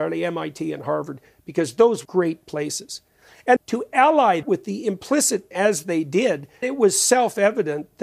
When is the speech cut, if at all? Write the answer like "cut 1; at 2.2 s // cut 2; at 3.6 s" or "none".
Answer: cut 1; at 2.0 s // cut 2; at 3.6 s // cut 3; at 4.4 s // cut 4; at 5.5 s // cut 5; at 6.6 s